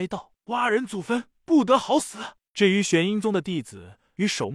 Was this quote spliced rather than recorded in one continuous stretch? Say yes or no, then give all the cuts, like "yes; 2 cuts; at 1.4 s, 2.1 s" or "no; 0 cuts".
no; 0 cuts